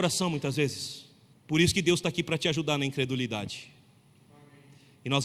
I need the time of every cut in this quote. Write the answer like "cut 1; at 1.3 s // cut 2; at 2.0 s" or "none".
cut 1; at 1.3 s